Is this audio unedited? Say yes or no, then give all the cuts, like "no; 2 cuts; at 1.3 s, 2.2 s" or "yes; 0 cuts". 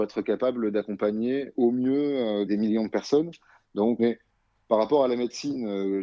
no; 3 cuts; at 1.5 s, 2.5 s, 4.0 s